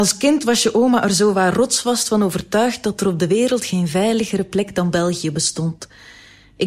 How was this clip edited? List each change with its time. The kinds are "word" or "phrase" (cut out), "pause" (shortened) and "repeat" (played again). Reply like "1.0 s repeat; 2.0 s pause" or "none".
none